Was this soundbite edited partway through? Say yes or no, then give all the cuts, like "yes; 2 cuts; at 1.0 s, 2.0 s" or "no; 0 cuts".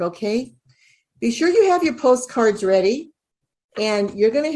no; 0 cuts